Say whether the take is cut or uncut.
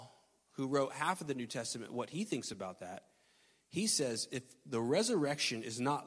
uncut